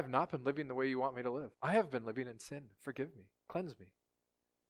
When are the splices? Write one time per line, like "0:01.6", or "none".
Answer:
0:01.5
0:03.4